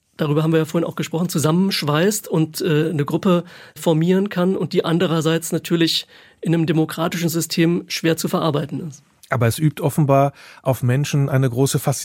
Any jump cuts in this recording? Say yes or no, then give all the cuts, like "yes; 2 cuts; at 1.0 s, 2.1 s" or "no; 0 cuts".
no; 0 cuts